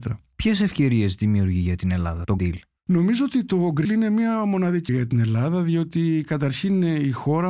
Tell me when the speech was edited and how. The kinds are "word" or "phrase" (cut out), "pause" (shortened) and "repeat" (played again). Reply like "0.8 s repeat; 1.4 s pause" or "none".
2.4 s word; 3.8 s word; 4.9 s word